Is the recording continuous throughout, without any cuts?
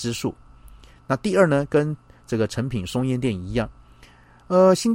yes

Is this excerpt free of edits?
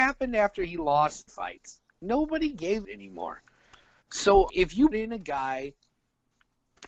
no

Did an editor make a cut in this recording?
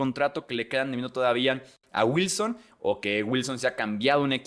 no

